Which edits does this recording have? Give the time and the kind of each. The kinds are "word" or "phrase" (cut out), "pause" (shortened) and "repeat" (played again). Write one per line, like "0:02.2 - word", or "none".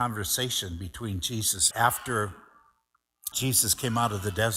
0:01.7 - phrase
0:03.3 - word